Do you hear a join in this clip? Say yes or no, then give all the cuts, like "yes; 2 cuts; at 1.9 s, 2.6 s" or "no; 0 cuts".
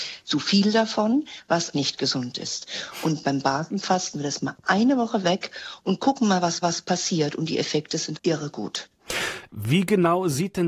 yes; 4 cuts; at 1.7 s, 4.1 s, 6.6 s, 8.2 s